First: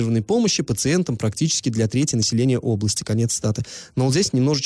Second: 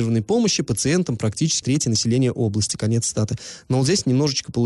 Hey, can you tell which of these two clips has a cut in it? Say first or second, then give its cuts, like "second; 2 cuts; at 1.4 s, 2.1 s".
second; 1 cut; at 1.6 s